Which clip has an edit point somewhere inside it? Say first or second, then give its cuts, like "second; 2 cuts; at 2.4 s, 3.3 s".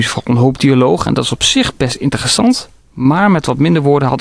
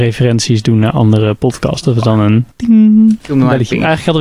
second; 1 cut; at 2.5 s